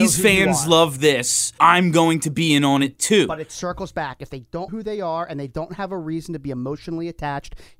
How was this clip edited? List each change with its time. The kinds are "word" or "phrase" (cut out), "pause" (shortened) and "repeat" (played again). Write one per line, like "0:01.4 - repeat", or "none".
0:01.6 - word
0:04.7 - word